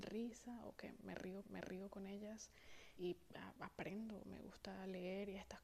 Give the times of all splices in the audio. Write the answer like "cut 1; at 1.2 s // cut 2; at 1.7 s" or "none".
cut 1; at 1.4 s // cut 2; at 3.0 s // cut 3; at 3.6 s